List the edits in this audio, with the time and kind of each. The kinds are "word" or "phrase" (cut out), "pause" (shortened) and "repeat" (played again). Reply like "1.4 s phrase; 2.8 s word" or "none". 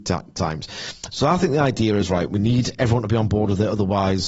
none